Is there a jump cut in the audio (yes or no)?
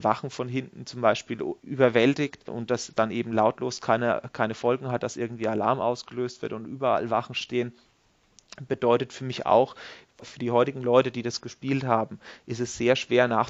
no